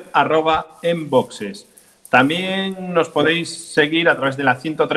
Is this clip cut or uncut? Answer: uncut